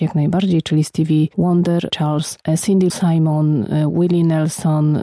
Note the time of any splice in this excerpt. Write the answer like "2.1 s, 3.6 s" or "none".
1.9 s, 2.9 s